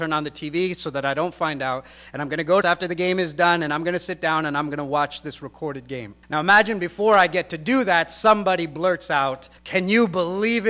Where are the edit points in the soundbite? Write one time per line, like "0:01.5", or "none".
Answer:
0:02.6
0:06.2
0:09.6